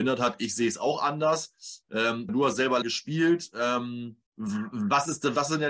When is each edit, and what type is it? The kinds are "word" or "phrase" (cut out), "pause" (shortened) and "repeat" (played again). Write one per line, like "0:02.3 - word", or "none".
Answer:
0:02.3 - word
0:02.8 - word
0:04.3 - pause